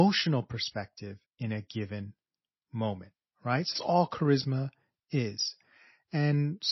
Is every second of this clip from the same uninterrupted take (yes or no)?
no